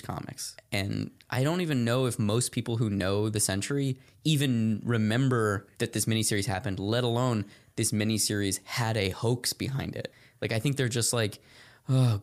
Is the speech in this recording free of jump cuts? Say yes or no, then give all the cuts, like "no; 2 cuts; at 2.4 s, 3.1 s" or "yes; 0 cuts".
yes; 0 cuts